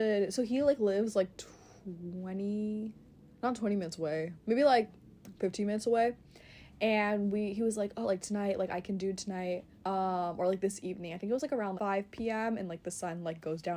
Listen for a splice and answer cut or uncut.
cut